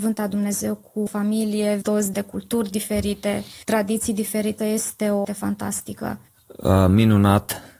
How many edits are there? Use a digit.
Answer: 6